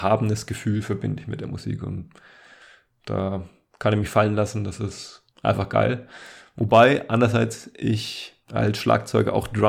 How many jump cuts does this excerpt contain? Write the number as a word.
two